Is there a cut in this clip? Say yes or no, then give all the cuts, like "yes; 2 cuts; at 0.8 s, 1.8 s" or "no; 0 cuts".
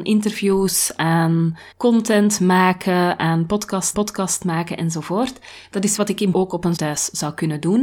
yes; 5 cuts; at 1.7 s, 3.9 s, 6.0 s, 6.3 s, 6.8 s